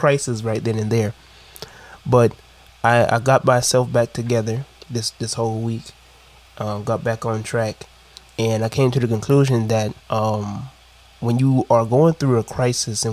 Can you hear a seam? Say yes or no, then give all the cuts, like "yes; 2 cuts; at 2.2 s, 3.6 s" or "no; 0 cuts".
yes; 1 cut; at 10.0 s